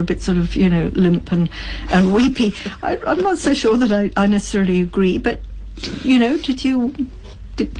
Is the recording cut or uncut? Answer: uncut